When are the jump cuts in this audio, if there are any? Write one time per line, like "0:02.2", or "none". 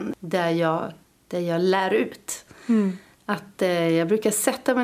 0:01.0